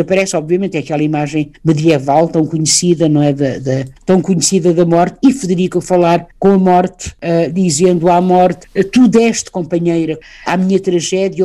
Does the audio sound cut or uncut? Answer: cut